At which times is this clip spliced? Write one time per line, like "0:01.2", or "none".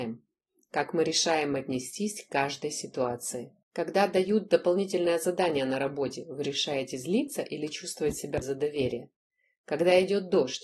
0:03.6
0:08.4